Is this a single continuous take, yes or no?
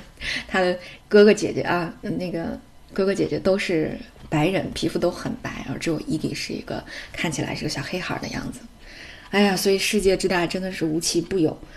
no